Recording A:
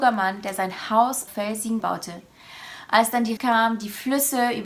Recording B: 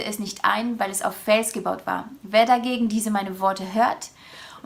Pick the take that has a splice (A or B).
A